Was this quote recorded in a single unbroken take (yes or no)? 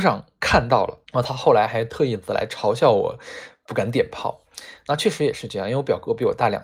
no